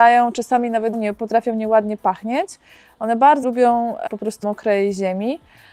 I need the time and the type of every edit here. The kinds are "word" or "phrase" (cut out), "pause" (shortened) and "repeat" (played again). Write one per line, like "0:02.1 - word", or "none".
0:00.9 - word
0:03.4 - word
0:04.1 - word
0:04.4 - word